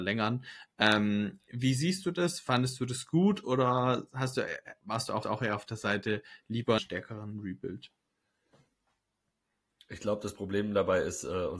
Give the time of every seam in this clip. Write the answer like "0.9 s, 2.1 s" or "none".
5.2 s, 6.8 s